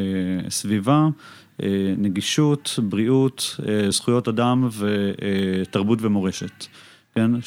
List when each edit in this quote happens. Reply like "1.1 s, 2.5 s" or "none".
none